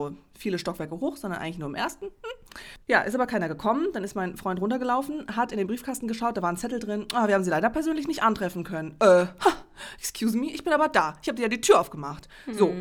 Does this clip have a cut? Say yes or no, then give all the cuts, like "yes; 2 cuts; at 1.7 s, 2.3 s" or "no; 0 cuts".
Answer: no; 0 cuts